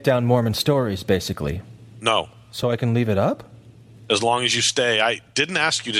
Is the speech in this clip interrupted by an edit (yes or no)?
no